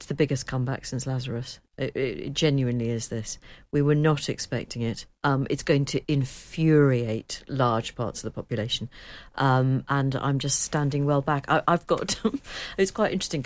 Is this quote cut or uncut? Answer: cut